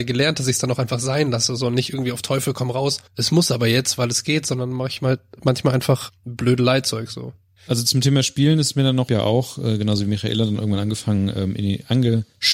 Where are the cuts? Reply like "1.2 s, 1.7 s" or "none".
3.1 s, 6.1 s, 9.1 s